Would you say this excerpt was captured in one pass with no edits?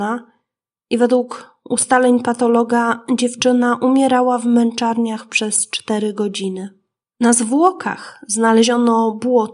yes; 0 cuts

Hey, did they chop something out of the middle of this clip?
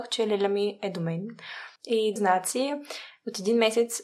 yes; 2 cuts; at 1.8 s, 2.2 s

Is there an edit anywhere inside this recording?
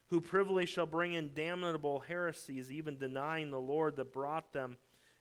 no; 0 cuts

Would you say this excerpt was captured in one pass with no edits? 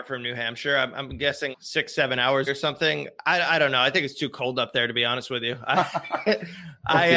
no; 2 cuts; at 1.5 s, 2.5 s

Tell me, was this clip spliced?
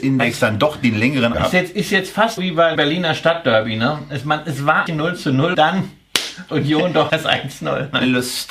yes; 7 cuts; at 1.3 s, 2.4 s, 2.8 s, 4.9 s, 5.5 s, 6.5 s, 7.1 s

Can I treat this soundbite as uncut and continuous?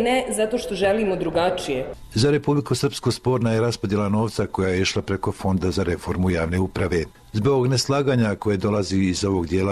yes; 0 cuts

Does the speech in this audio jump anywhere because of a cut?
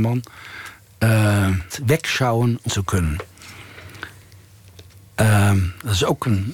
yes; 2 cuts; at 1.7 s, 2.7 s

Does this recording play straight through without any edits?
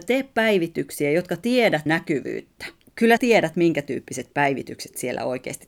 no; 2 cuts; at 1.9 s, 3.2 s

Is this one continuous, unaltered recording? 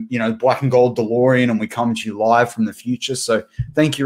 yes; 0 cuts

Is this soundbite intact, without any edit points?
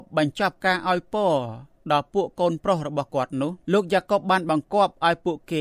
no; 1 cut; at 3.6 s

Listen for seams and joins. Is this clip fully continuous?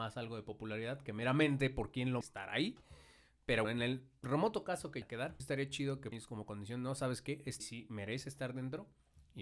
no; 6 cuts; at 2.2 s, 3.6 s, 5.0 s, 5.4 s, 6.1 s, 7.6 s

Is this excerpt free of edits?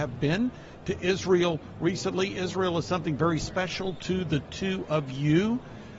yes; 0 cuts

